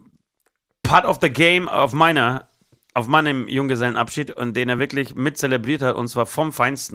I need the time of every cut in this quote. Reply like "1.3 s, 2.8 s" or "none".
none

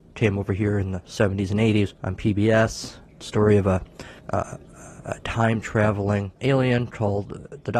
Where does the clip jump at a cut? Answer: 2.0 s, 4.2 s, 6.4 s

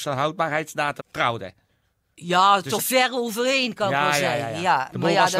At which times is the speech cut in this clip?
1.0 s, 2.8 s

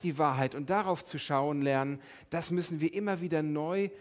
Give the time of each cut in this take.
none

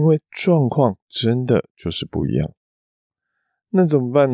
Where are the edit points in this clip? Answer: none

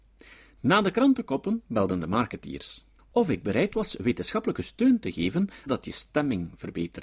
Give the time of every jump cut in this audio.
3.0 s, 5.7 s

